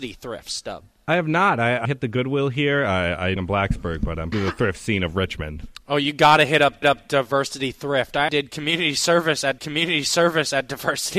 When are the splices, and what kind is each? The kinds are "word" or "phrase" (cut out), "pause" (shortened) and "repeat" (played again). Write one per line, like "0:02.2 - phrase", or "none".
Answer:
0:01.8 - phrase
0:03.4 - phrase
0:04.3 - phrase
0:06.8 - repeat
0:08.3 - word
0:09.6 - repeat